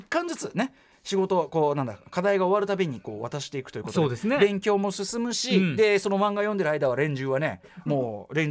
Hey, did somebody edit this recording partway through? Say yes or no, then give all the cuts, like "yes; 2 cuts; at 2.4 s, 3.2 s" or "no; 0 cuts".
no; 0 cuts